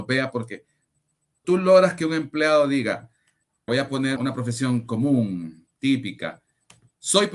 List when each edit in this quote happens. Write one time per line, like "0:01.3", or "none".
0:01.4
0:03.7
0:04.2

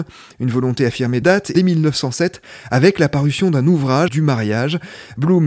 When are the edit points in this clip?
0:01.2
0:01.5
0:04.1

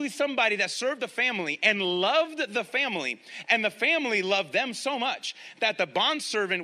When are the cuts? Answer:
none

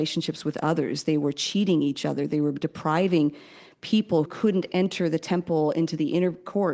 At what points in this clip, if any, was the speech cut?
0:04.3

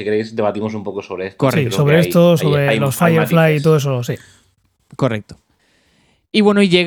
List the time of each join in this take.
none

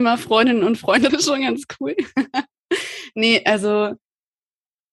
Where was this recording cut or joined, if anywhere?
0:01.1

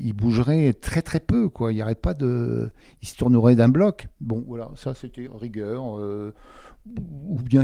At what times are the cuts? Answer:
0:05.3

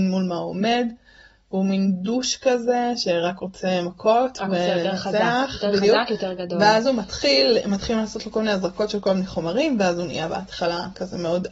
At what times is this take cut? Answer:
none

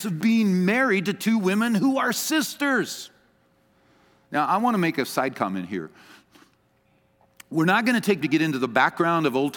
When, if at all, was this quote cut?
0:08.2

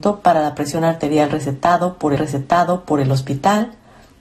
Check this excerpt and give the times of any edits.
0:02.2

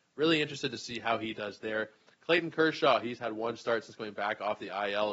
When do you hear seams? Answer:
none

